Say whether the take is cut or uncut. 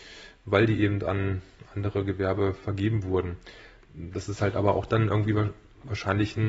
uncut